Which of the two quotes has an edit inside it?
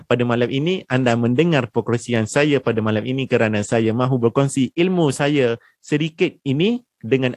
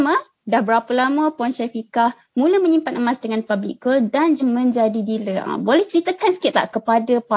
second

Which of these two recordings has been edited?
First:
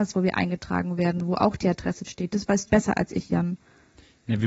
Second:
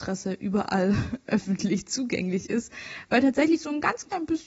first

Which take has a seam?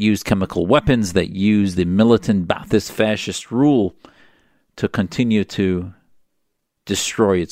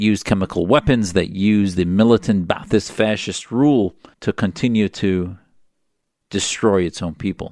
second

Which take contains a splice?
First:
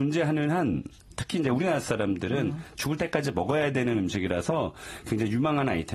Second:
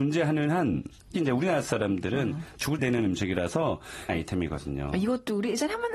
second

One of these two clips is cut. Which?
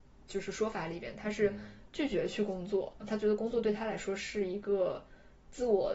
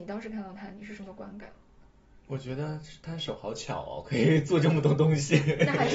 first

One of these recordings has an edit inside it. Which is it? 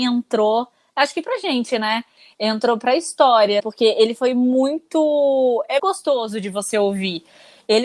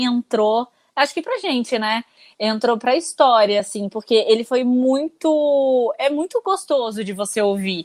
first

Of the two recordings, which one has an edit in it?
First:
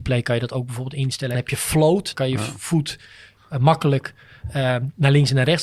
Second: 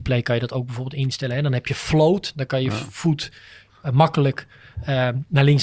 first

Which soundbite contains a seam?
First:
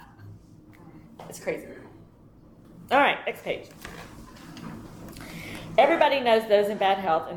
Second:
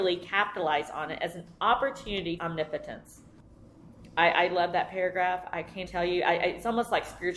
second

